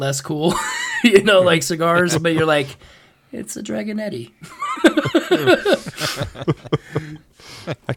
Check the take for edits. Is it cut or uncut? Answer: uncut